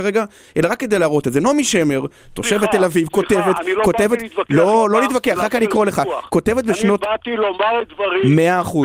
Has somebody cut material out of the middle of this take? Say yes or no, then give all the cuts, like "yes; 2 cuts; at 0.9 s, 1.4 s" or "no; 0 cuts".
yes; 1 cut; at 5.6 s